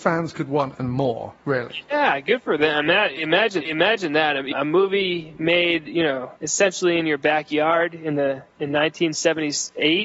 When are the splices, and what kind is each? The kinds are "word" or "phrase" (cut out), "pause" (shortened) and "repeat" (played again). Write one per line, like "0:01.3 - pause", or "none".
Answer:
0:01.4 - pause
0:03.6 - repeat
0:04.5 - word
0:06.4 - pause
0:08.5 - pause